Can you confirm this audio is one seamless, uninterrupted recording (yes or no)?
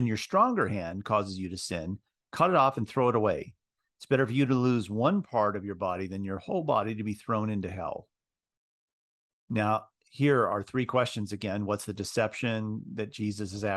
yes